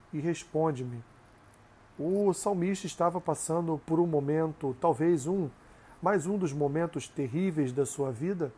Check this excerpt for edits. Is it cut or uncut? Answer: cut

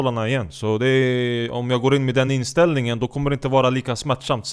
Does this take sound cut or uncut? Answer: uncut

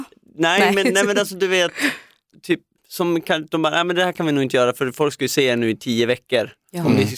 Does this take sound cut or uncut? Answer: uncut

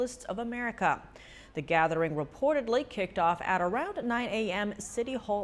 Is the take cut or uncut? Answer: uncut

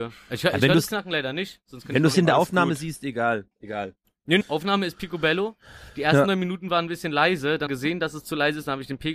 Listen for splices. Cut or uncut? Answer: cut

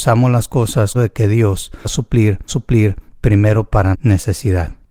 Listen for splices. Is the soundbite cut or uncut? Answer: cut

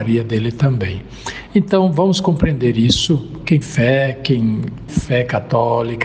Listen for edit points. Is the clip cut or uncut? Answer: cut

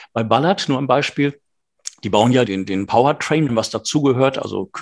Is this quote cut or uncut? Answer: cut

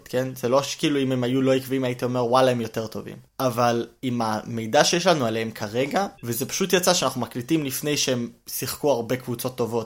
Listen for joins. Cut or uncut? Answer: cut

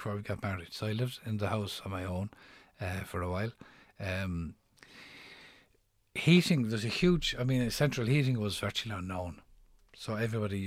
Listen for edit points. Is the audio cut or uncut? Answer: uncut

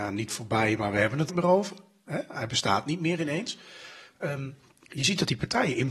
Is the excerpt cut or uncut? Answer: cut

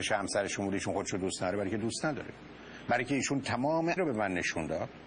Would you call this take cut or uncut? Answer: cut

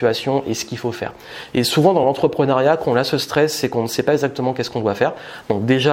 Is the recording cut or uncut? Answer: uncut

